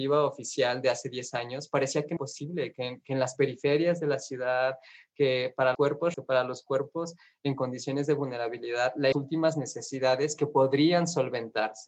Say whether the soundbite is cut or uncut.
cut